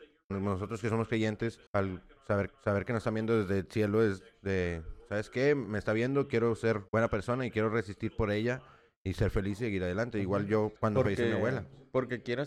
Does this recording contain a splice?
yes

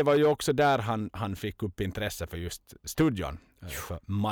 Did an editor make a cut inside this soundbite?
no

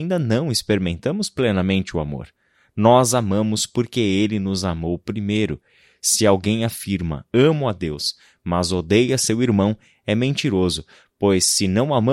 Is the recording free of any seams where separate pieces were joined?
yes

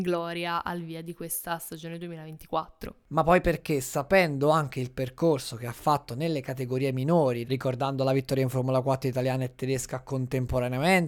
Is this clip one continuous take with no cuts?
yes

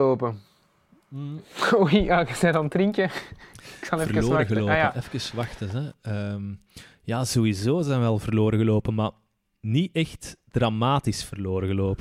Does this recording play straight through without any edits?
yes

